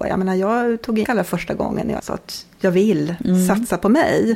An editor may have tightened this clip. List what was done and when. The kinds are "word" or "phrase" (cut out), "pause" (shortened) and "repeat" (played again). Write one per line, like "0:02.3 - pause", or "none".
0:01.0 - word
0:02.0 - word